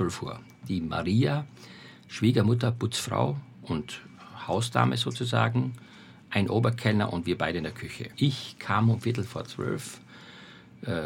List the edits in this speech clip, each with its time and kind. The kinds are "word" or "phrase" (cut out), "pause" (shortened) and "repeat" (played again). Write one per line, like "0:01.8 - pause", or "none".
0:08.1 - pause